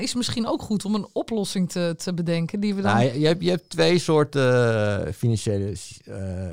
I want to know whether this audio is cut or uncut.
uncut